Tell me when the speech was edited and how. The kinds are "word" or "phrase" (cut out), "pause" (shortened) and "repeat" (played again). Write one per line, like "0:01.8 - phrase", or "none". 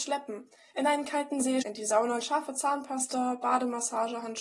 0:01.6 - word
0:02.2 - word